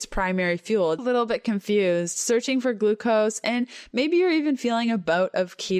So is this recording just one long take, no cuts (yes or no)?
no